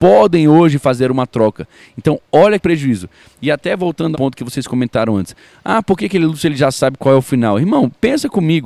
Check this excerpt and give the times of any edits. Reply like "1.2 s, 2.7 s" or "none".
2.6 s, 4.1 s